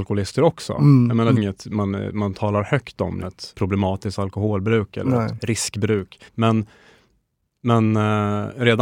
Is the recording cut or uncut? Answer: cut